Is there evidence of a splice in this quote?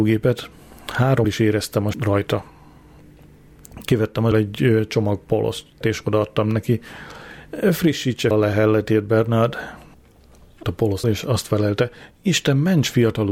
yes; 7 cuts; at 1.2 s, 1.9 s, 4.3 s, 5.8 s, 8.3 s, 10.6 s, 11.0 s

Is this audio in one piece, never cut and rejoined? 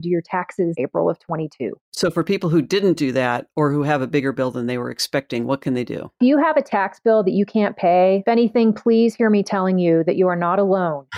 no; 1 cut; at 1.8 s

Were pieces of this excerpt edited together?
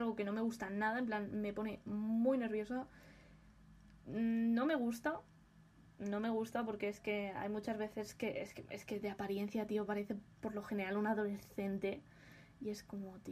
no; 0 cuts

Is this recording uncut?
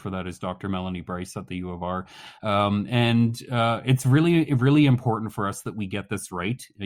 yes; 0 cuts

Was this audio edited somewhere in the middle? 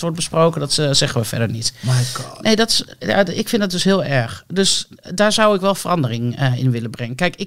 no; 0 cuts

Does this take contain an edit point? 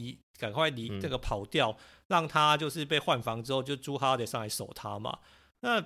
no; 0 cuts

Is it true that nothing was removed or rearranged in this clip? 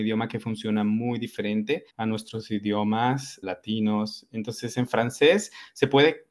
no; 2 cuts; at 1.9 s, 3.4 s

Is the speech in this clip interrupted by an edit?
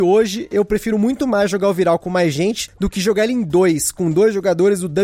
no; 0 cuts

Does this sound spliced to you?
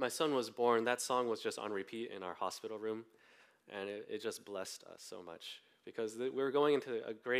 no; 0 cuts

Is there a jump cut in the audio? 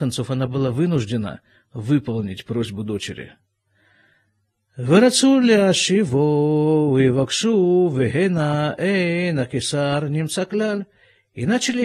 no; 0 cuts

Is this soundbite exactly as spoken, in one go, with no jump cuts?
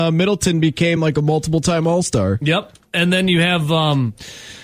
yes; 0 cuts

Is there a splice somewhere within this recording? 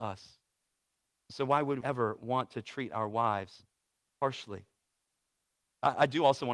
yes; 1 cut; at 1.8 s

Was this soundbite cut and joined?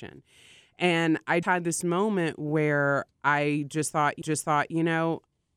yes; 2 cuts; at 1.4 s, 4.2 s

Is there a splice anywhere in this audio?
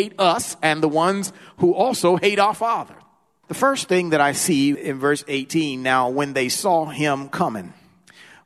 no; 0 cuts

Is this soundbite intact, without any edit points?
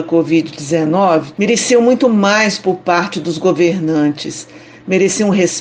yes; 0 cuts

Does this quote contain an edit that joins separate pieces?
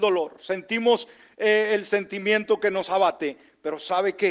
no; 0 cuts

